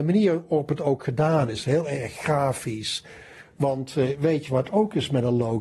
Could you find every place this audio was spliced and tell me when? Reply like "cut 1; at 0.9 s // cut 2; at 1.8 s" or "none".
none